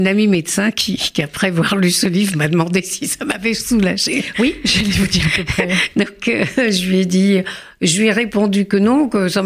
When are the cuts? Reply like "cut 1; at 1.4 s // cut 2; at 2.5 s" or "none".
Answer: none